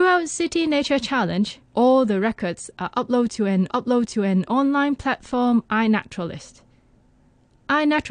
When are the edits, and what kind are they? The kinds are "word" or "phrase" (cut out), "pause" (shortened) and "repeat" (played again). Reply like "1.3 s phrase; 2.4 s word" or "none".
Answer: 1.6 s pause; 3.7 s repeat